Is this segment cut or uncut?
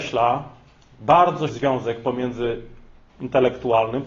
cut